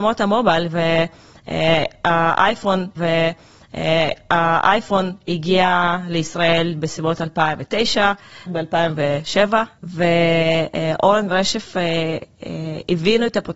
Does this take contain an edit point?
yes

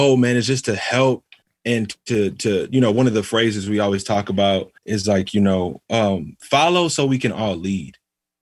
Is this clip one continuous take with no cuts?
no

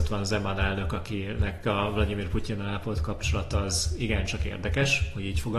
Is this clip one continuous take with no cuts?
yes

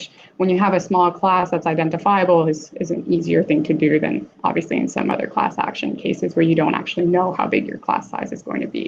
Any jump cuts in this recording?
yes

